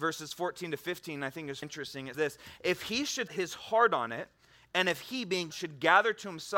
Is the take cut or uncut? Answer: cut